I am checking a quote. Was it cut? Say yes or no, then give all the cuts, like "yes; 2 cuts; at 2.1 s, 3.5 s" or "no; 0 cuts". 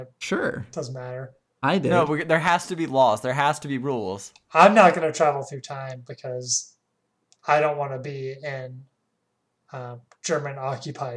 no; 0 cuts